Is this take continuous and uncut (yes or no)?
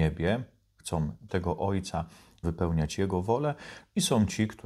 no